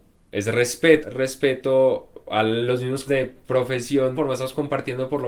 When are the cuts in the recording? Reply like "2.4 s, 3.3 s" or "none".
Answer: 1.0 s, 3.1 s, 4.1 s